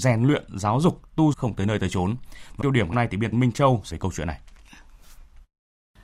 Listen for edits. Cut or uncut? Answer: cut